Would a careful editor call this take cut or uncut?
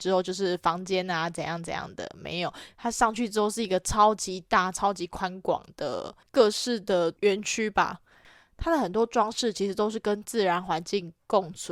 uncut